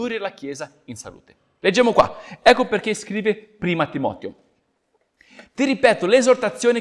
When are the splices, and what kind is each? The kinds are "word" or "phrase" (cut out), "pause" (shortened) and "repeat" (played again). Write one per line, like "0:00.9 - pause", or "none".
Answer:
none